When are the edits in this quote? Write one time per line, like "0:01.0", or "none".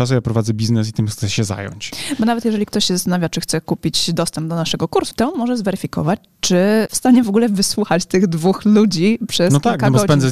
0:05.1
0:06.9